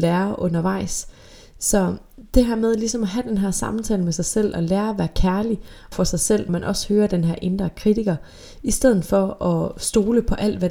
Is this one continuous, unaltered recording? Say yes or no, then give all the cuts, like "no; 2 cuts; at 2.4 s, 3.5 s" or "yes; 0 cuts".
no; 2 cuts; at 5.9 s, 6.5 s